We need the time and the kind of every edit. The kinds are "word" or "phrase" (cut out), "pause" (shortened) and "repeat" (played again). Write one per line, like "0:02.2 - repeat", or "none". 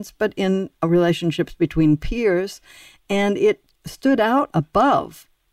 none